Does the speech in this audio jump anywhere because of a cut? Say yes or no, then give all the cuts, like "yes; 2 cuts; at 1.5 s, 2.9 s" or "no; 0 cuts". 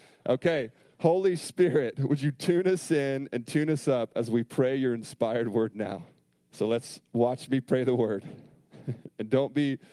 yes; 1 cut; at 6.3 s